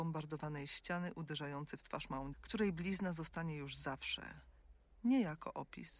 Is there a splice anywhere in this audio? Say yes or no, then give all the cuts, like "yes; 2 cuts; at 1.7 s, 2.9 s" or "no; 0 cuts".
yes; 1 cut; at 2.3 s